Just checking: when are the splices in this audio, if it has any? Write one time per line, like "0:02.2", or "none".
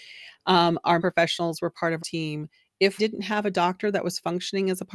0:01.0
0:02.0
0:03.0